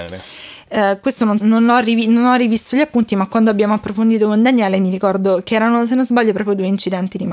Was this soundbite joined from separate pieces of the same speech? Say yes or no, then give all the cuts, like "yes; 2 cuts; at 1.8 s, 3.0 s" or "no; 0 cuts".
yes; 1 cut; at 1.4 s